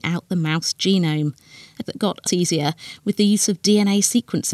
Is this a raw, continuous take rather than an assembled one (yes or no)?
no